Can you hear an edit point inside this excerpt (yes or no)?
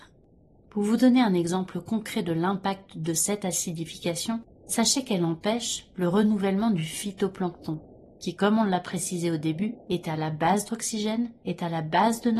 yes